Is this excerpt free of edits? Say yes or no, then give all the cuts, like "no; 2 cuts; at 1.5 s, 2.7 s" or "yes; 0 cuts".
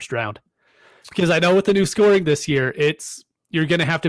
yes; 0 cuts